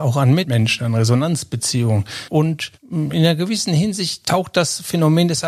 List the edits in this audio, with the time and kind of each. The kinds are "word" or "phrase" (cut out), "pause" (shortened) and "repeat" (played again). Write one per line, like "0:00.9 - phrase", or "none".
0:02.7 - pause
0:04.2 - word